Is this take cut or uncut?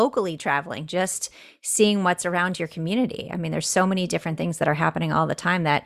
uncut